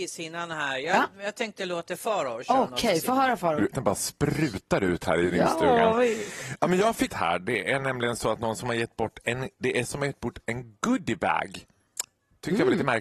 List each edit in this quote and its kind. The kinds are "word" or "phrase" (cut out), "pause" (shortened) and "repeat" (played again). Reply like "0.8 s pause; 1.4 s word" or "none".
3.7 s phrase; 7.1 s phrase; 9.5 s pause; 9.8 s word